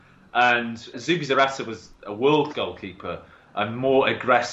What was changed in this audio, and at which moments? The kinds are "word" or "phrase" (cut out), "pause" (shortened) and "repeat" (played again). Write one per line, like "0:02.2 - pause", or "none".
0:00.9 - word
0:02.5 - word